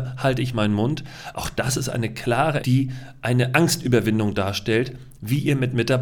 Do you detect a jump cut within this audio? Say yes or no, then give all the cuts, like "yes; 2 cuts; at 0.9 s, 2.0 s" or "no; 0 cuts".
yes; 1 cut; at 2.6 s